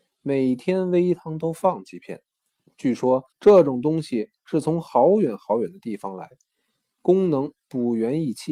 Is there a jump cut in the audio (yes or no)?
yes